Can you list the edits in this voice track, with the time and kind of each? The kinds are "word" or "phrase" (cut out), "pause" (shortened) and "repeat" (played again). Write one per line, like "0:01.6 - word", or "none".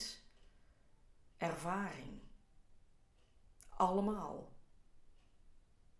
0:01.3 - pause